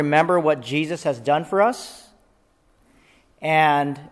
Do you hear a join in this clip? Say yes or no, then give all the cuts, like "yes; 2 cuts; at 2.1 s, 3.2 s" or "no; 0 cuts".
no; 0 cuts